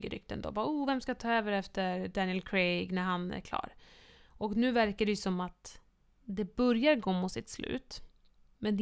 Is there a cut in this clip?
no; 0 cuts

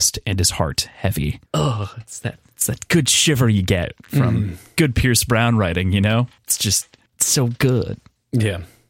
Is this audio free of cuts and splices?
no; 2 cuts; at 1.5 s, 7.1 s

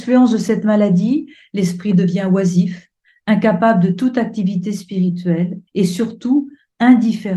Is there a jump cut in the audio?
yes; 1 cut; at 5.7 s

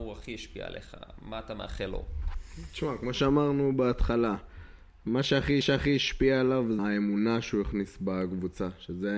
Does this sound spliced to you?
yes; 2 cuts; at 5.6 s, 6.8 s

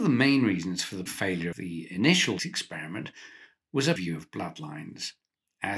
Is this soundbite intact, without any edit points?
no; 4 cuts; at 1.1 s, 1.5 s, 2.4 s, 4.0 s

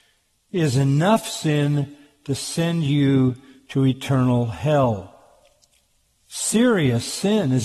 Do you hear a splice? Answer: no; 0 cuts

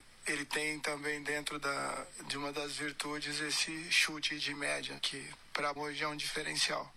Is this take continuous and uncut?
no; 2 cuts; at 5.0 s, 5.8 s

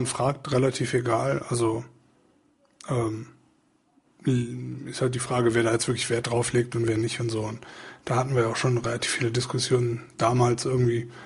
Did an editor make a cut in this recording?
no; 0 cuts

